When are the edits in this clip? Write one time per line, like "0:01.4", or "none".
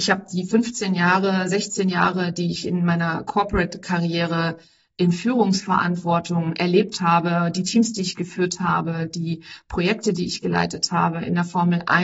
none